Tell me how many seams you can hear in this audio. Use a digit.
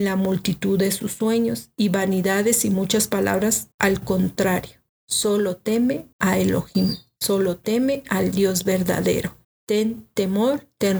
4